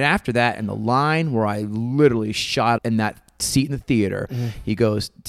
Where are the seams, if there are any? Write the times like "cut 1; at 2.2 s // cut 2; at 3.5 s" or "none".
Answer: cut 1; at 2.8 s